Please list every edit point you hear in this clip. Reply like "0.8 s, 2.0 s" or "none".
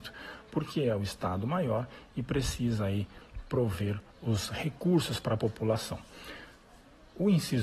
4.1 s

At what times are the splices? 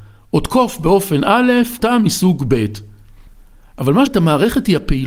1.8 s, 4.1 s

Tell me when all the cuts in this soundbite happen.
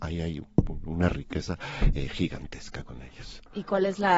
none

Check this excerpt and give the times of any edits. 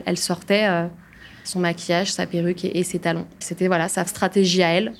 none

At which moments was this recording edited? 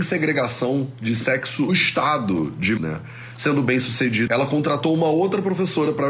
1.7 s, 2.8 s, 4.3 s

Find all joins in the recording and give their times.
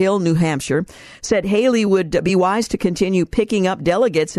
none

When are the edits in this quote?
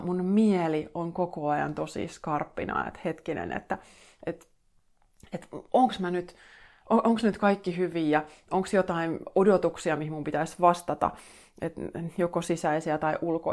none

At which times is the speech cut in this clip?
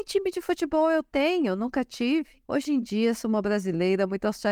2.4 s

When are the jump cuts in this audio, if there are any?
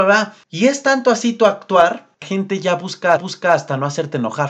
2.2 s, 3.2 s

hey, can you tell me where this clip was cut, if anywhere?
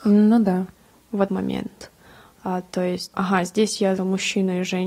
1.3 s, 3.1 s, 4.0 s

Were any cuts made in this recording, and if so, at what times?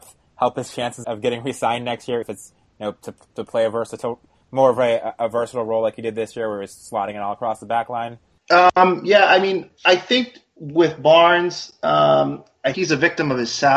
1.0 s, 2.2 s, 12.7 s

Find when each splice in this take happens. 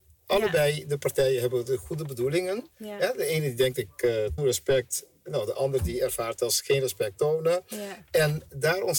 4.4 s

